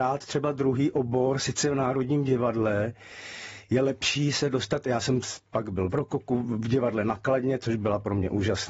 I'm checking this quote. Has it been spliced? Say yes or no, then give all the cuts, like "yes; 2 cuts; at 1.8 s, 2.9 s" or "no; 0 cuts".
no; 0 cuts